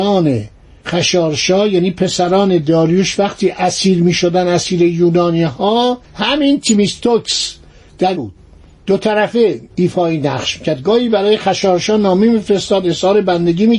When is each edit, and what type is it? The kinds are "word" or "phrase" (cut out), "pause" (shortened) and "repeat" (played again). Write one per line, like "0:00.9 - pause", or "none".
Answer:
0:06.0 - pause
0:08.1 - phrase
0:09.7 - pause